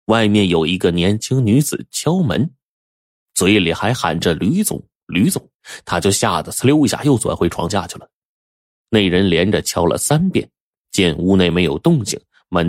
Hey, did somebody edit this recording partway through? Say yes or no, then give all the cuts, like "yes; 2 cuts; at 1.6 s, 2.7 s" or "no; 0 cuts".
yes; 1 cut; at 5.5 s